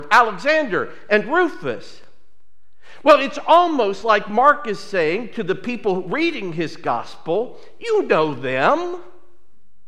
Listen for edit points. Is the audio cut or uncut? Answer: uncut